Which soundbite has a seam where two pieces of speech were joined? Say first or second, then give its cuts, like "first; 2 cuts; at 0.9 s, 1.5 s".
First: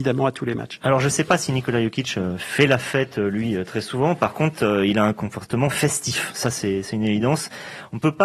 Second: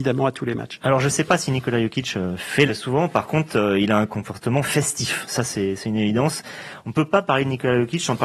second; 1 cut; at 2.7 s